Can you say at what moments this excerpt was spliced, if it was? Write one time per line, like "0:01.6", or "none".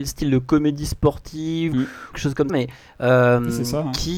0:01.7
0:02.1
0:02.5